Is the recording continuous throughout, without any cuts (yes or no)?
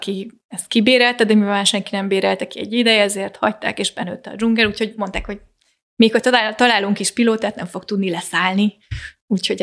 yes